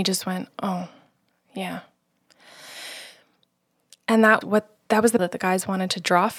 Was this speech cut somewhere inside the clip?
yes; 2 cuts; at 4.4 s, 5.2 s

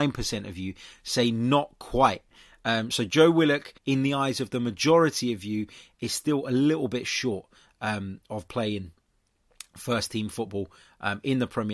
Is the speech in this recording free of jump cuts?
no; 1 cut; at 3.8 s

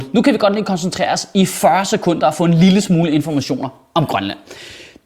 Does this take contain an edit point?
no; 0 cuts

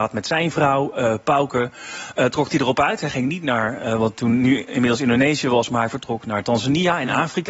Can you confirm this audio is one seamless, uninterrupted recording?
yes; 0 cuts

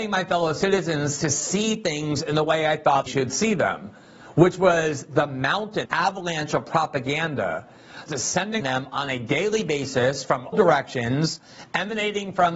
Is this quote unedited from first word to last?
no; 5 cuts; at 3.1 s, 5.8 s, 8.1 s, 8.6 s, 10.5 s

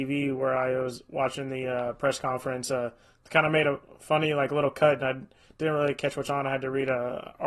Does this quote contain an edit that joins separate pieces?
no; 0 cuts

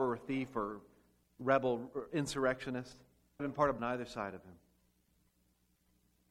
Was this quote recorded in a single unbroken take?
no; 3 cuts; at 1.2 s, 3.4 s, 3.8 s

